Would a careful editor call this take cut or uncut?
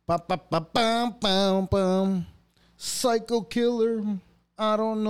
uncut